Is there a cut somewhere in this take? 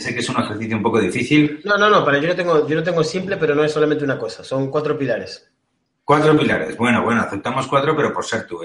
no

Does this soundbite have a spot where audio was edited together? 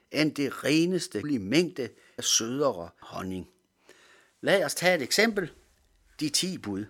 yes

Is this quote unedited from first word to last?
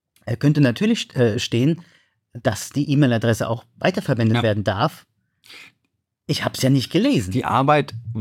yes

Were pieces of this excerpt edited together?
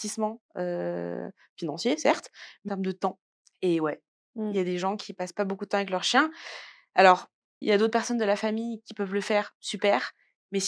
yes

